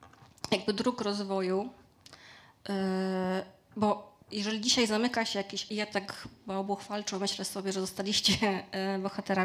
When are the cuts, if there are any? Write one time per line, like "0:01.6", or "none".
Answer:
0:04.2
0:05.7